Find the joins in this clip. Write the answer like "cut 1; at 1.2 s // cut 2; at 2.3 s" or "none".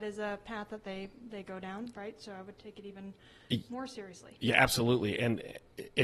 none

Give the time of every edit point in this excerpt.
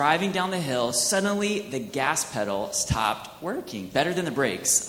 none

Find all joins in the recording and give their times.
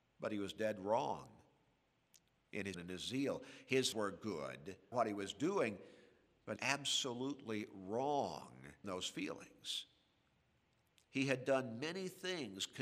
cut 1; at 2.7 s // cut 2; at 3.9 s // cut 3; at 4.9 s // cut 4; at 6.6 s // cut 5; at 8.8 s

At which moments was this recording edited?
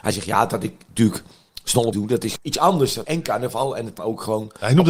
cut 1; at 1.9 s // cut 2; at 2.4 s // cut 3; at 3.0 s // cut 4; at 4.0 s

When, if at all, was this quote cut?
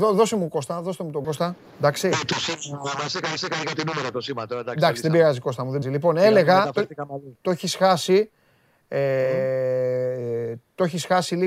cut 1; at 1.2 s // cut 2; at 1.7 s // cut 3; at 3.4 s // cut 4; at 5.8 s // cut 5; at 7.4 s

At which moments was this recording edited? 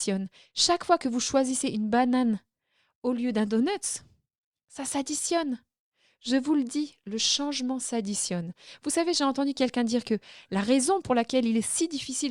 none

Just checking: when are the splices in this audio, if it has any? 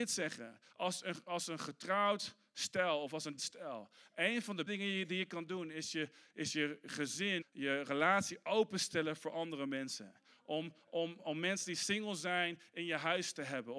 cut 1; at 3.4 s // cut 2; at 4.7 s // cut 3; at 7.4 s // cut 4; at 11.2 s

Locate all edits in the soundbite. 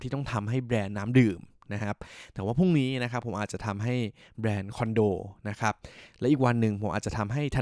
none

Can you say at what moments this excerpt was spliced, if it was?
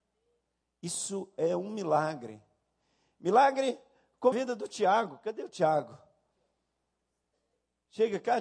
cut 1; at 4.3 s

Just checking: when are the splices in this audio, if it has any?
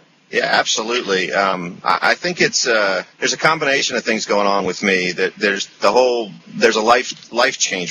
cut 1; at 3.1 s

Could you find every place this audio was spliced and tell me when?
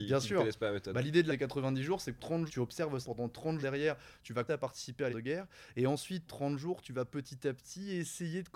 cut 1; at 1.3 s // cut 2; at 2.2 s // cut 3; at 2.5 s // cut 4; at 3.0 s // cut 5; at 3.6 s // cut 6; at 4.5 s // cut 7; at 5.1 s // cut 8; at 6.3 s

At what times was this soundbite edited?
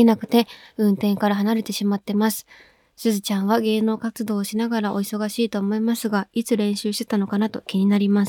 none

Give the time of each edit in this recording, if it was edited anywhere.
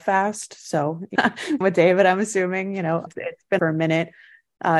cut 1; at 1.1 s // cut 2; at 1.6 s // cut 3; at 3.1 s // cut 4; at 3.6 s

